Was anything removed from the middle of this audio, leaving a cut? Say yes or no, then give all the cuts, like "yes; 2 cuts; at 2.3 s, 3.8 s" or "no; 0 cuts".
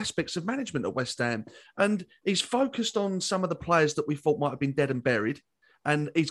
no; 0 cuts